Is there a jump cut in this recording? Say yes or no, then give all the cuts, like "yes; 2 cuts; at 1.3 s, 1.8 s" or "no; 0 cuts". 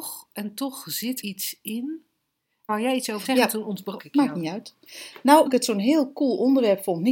yes; 5 cuts; at 1.2 s, 2.7 s, 3.2 s, 4.0 s, 5.5 s